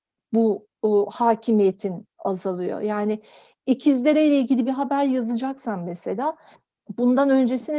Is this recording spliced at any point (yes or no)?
no